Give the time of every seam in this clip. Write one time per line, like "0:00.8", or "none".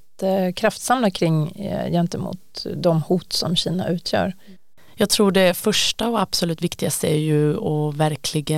none